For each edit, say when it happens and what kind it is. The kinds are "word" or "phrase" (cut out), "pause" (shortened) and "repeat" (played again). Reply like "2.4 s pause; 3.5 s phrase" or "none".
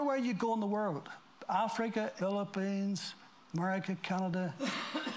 2.2 s word